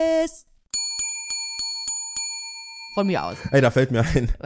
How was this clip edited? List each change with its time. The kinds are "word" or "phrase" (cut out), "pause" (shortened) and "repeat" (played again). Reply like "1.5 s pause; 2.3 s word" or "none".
none